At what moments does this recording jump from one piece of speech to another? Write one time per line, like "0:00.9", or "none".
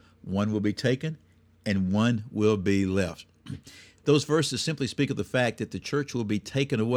none